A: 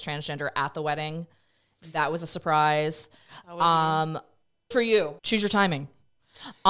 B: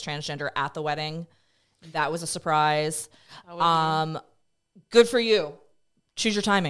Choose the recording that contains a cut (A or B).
A